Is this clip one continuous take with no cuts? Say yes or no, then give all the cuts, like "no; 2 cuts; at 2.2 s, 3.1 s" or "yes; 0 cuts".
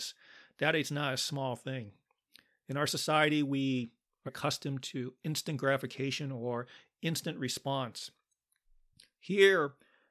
no; 1 cut; at 4.3 s